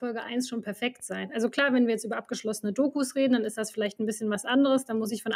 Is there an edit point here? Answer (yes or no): no